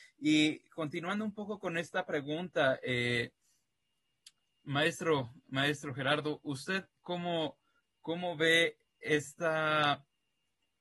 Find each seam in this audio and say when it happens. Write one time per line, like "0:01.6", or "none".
none